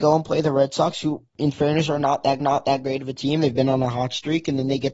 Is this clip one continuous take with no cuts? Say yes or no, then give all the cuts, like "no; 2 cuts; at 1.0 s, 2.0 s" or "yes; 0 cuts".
no; 1 cut; at 2.4 s